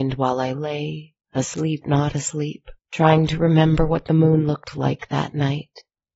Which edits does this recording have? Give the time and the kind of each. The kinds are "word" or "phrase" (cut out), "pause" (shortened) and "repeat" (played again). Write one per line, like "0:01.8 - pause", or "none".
0:01.8 - word
0:02.8 - pause